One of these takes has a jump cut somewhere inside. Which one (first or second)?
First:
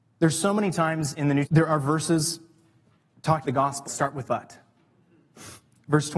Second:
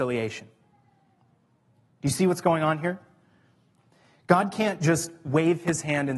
first